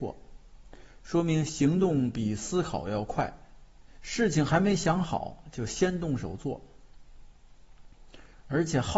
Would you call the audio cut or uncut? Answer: cut